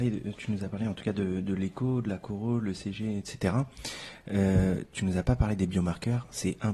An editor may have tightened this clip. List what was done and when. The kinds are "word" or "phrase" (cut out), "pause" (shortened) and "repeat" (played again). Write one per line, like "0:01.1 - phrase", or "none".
none